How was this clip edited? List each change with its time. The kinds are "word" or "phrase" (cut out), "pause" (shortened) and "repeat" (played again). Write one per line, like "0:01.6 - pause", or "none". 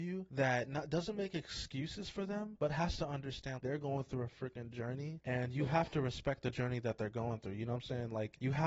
0:03.6 - word